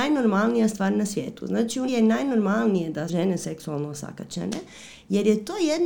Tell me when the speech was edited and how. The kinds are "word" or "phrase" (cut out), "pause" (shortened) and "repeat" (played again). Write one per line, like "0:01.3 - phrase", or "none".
0:01.9 - word
0:03.1 - word